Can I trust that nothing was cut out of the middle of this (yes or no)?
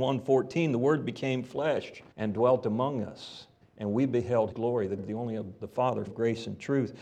no